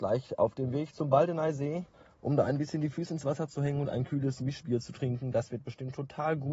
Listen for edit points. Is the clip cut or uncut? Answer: cut